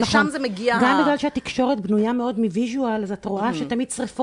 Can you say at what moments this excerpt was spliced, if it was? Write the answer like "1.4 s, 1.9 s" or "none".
none